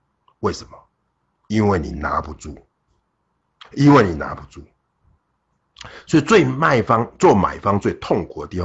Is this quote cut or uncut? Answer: uncut